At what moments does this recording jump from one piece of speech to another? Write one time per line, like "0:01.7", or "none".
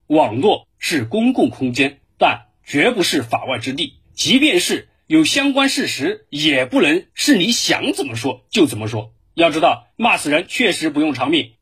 0:09.9

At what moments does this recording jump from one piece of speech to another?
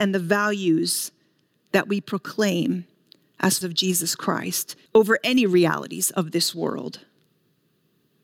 0:03.6
0:04.9

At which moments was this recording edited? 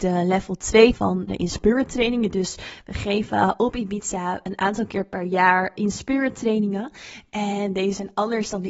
0:00.9
0:01.3
0:05.8

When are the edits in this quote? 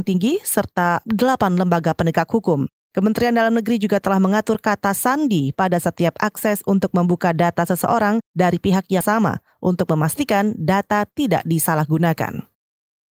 0:09.0

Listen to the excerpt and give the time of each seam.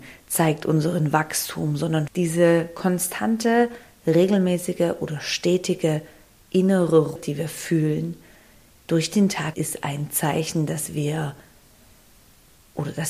0:02.1
0:07.2
0:09.5

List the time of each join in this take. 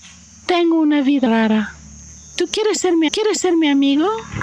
0:01.3
0:03.1

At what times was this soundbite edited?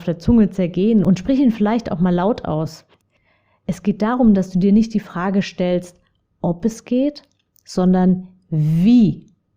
none

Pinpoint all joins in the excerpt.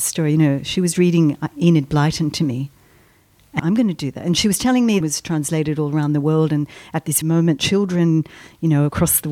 0:03.6
0:05.0
0:07.2

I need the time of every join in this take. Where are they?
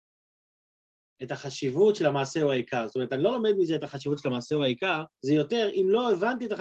0:05.1

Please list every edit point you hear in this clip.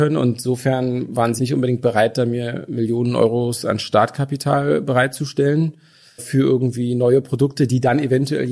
0:01.4
0:06.2

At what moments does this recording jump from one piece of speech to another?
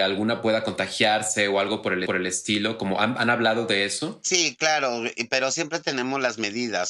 0:02.1

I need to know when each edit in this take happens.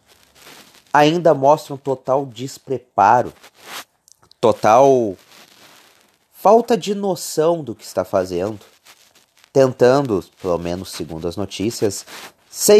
none

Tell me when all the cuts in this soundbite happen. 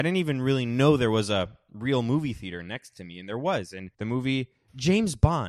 0:03.9

